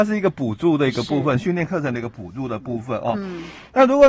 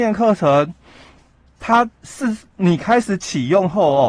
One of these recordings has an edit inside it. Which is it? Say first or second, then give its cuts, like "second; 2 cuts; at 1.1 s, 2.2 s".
second; 1 cut; at 1.9 s